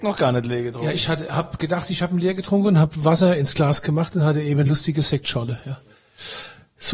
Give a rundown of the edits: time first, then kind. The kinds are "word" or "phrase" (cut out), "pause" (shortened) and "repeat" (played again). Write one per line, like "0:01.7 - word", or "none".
none